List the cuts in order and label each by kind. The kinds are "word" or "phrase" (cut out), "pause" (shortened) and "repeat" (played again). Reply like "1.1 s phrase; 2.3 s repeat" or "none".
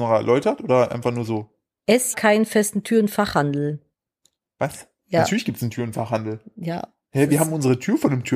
2.1 s word